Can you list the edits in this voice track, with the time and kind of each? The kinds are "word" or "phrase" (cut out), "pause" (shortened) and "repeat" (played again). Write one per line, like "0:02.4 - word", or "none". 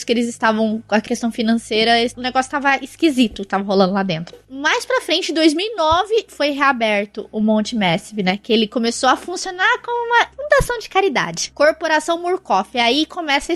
none